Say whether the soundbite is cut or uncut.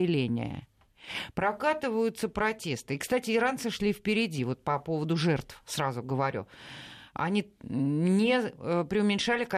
uncut